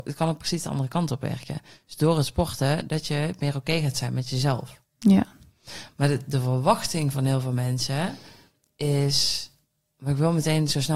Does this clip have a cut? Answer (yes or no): no